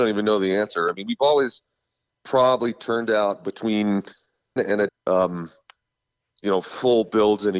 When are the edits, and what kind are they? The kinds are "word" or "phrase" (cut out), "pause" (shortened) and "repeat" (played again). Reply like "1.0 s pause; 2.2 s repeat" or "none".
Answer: 4.6 s word; 4.9 s word